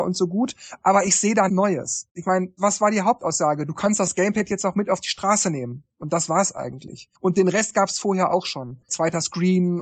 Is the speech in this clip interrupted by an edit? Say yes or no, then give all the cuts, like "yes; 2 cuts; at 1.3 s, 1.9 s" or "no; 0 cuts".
yes; 2 cuts; at 1.5 s, 7.1 s